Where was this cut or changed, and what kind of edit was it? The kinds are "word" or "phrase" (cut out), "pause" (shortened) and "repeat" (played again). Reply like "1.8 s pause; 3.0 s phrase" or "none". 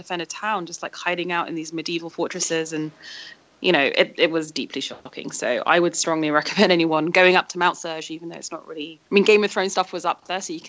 9.1 s pause